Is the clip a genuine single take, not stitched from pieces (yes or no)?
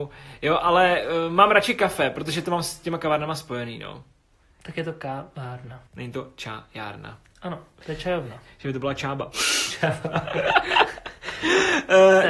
no